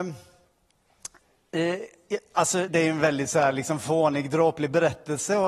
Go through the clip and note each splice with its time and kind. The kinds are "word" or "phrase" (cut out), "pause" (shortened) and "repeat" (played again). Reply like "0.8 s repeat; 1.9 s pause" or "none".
2.7 s word